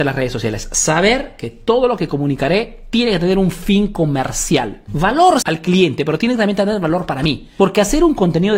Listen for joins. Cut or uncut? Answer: cut